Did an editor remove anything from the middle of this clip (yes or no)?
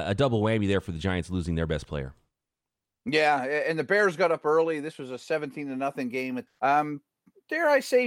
yes